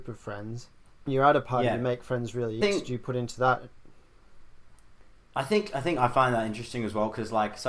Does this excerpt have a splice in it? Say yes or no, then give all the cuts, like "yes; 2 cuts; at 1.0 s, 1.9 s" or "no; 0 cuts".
yes; 2 cuts; at 1.1 s, 2.6 s